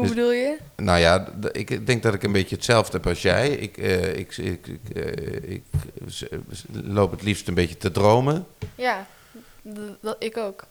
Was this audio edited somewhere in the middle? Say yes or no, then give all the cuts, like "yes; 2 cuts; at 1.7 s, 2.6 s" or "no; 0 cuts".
no; 0 cuts